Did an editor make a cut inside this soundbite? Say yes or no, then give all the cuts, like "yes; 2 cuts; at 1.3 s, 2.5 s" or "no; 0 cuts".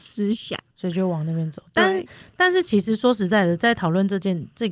no; 0 cuts